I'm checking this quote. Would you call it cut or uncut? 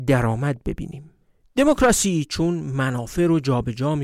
uncut